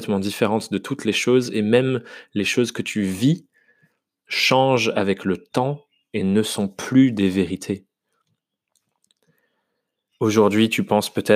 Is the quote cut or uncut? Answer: uncut